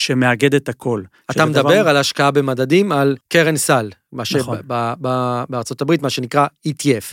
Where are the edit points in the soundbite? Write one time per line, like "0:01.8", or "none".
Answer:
0:03.2